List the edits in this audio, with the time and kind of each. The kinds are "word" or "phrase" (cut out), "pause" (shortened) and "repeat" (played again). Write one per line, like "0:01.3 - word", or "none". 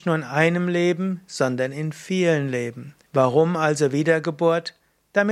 0:03.1 - pause